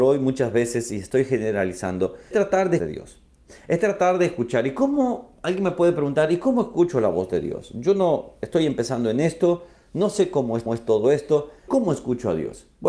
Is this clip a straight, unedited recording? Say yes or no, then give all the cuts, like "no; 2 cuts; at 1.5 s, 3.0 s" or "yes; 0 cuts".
no; 4 cuts; at 2.3 s, 2.8 s, 10.7 s, 11.7 s